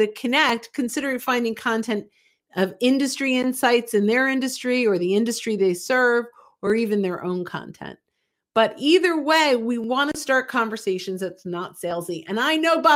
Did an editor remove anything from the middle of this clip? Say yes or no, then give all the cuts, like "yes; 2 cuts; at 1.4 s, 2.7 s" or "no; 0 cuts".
no; 0 cuts